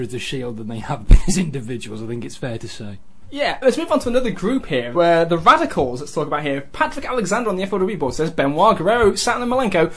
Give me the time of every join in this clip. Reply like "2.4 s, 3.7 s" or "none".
3.6 s, 4.9 s